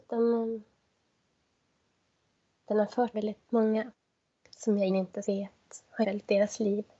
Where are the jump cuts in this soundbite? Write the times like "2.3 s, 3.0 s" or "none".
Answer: 3.1 s, 3.5 s, 4.9 s, 5.2 s, 6.0 s